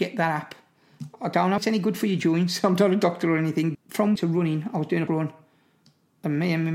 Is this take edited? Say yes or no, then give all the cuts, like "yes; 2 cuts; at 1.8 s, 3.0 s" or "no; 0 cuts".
yes; 4 cuts; at 1.6 s, 3.7 s, 4.2 s, 5.1 s